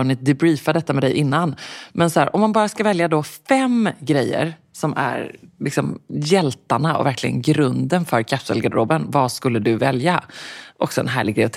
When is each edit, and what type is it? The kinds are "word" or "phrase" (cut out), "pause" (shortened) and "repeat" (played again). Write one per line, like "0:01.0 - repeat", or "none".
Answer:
none